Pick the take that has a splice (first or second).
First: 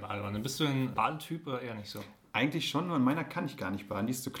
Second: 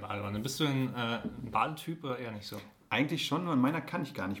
first